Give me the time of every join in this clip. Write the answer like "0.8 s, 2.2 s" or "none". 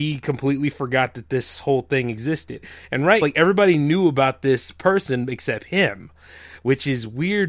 3.2 s